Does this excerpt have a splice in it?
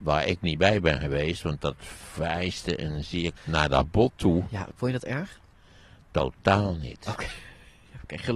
yes; 1 cut; at 3.4 s

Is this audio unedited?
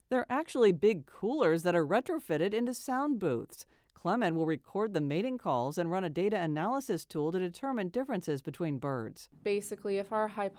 yes; 0 cuts

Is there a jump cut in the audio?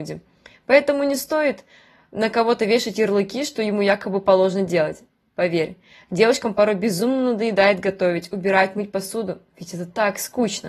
no; 0 cuts

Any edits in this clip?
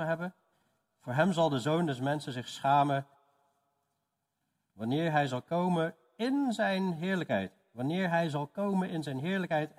no; 0 cuts

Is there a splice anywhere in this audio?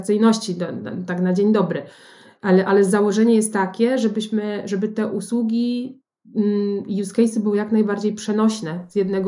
no; 0 cuts

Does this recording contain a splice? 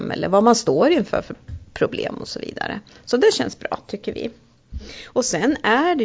no; 0 cuts

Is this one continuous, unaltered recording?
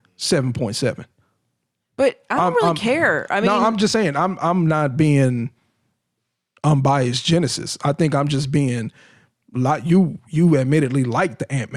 yes; 0 cuts

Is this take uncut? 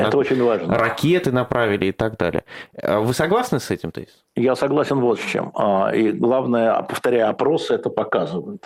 yes; 0 cuts

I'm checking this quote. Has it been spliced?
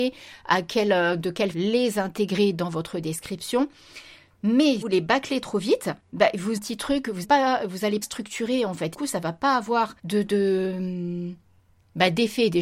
yes; 8 cuts; at 1.5 s, 4.8 s, 6.0 s, 6.6 s, 7.2 s, 8.0 s, 8.9 s, 10.0 s

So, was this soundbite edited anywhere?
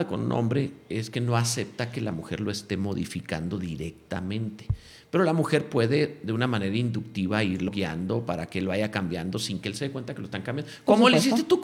no; 0 cuts

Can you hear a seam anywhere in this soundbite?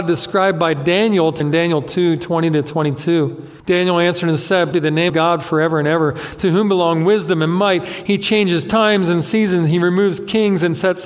yes; 4 cuts; at 1.4 s, 3.6 s, 4.7 s, 5.1 s

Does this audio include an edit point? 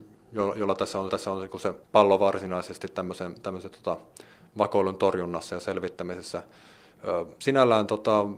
yes; 3 cuts; at 1.1 s, 1.8 s, 7.4 s

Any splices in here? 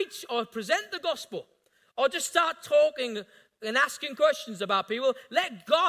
no; 0 cuts

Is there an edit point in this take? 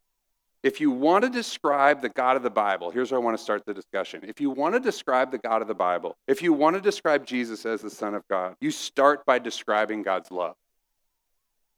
yes; 2 cuts; at 6.2 s, 8.6 s

